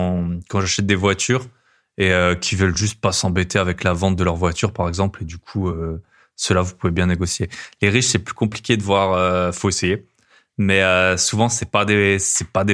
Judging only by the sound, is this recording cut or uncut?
uncut